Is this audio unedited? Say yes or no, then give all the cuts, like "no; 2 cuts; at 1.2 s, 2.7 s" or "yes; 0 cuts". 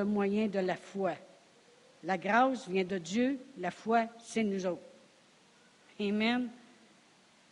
yes; 0 cuts